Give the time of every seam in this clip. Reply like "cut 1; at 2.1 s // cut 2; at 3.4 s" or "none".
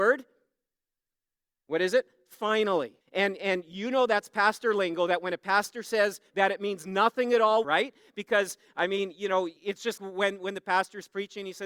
cut 1; at 3.0 s // cut 2; at 6.3 s // cut 3; at 7.6 s // cut 4; at 9.6 s // cut 5; at 10.0 s

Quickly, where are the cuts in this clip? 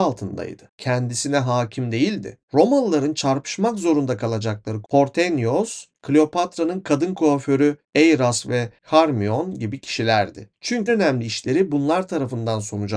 cut 1; at 4.8 s // cut 2; at 10.9 s

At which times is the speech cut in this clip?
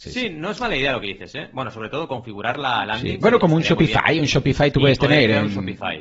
none

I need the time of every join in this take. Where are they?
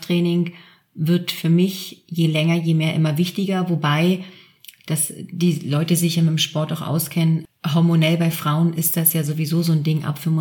none

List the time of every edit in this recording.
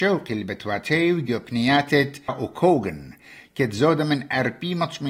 cut 1; at 2.3 s

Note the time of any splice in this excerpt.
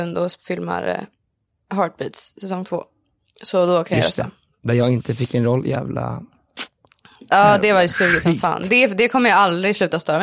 none

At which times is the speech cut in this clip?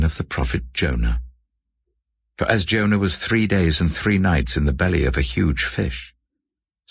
none

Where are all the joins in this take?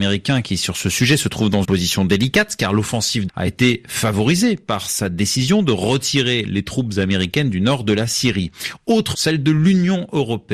cut 1; at 1.6 s // cut 2; at 3.3 s // cut 3; at 9.1 s

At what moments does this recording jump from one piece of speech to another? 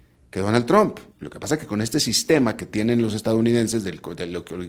cut 1; at 1.1 s

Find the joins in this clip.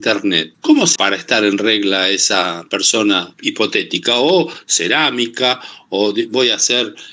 cut 1; at 1.0 s

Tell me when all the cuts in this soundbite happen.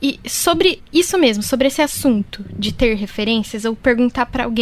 none

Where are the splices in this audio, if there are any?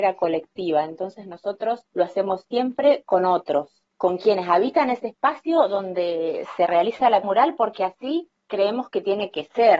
cut 1; at 1.9 s // cut 2; at 7.2 s // cut 3; at 8.4 s

